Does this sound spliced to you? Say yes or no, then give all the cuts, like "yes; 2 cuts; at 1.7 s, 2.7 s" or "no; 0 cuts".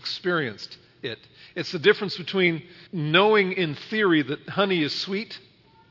yes; 1 cut; at 2.9 s